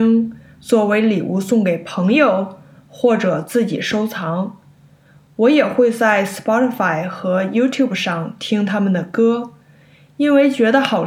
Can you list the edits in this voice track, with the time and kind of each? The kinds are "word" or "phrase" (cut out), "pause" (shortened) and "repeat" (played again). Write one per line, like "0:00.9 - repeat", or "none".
none